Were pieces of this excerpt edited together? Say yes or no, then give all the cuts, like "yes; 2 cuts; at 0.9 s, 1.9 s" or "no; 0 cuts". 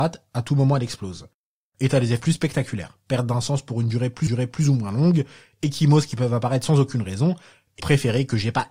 yes; 3 cuts; at 2.2 s, 4.3 s, 7.8 s